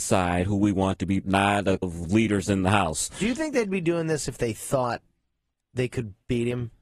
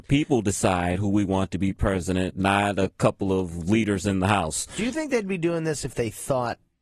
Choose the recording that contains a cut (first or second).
first